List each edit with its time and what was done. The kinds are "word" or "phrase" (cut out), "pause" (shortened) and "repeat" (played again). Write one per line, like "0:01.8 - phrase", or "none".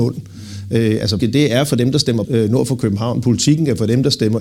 0:01.2 - word
0:02.2 - word